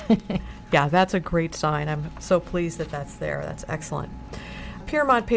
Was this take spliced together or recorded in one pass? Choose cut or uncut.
uncut